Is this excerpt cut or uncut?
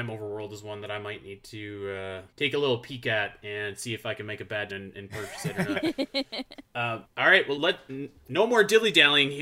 cut